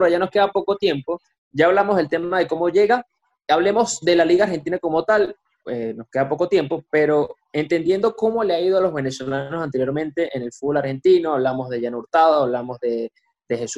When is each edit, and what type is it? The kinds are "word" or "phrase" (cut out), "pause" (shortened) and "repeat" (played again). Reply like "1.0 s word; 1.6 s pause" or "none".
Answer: none